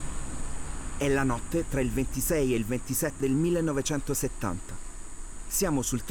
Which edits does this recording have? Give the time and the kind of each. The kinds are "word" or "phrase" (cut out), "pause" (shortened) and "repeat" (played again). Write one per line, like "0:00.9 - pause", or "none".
0:03.2 - word